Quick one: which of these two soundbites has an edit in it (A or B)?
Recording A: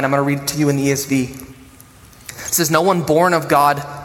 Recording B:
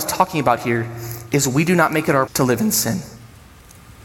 B